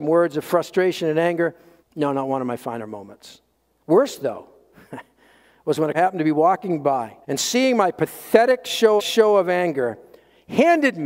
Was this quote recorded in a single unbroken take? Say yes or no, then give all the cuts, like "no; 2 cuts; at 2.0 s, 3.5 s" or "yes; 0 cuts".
no; 5 cuts; at 1.8 s, 3.5 s, 5.9 s, 7.2 s, 9.0 s